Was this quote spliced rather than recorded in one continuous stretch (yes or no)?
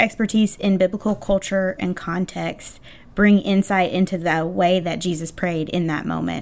no